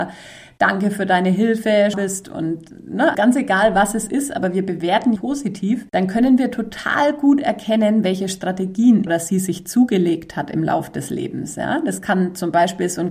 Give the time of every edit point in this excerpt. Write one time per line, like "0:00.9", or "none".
0:01.9
0:03.1
0:05.2
0:05.9
0:09.1